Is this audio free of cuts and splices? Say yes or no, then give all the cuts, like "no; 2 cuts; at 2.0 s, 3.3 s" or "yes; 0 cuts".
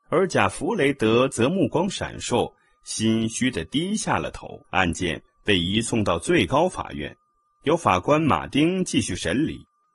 no; 1 cut; at 4.7 s